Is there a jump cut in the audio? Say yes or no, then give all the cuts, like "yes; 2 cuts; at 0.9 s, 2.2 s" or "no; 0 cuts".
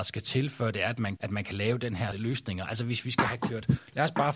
yes; 2 cuts; at 1.2 s, 2.1 s